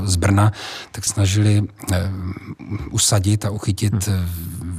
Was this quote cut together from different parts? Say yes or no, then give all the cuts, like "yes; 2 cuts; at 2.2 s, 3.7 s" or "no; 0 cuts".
yes; 1 cut; at 1.1 s